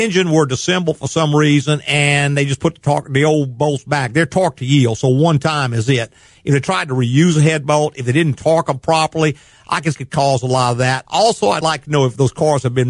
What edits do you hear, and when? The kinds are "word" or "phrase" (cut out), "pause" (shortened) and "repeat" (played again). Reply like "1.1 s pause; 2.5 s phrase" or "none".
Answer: 9.9 s phrase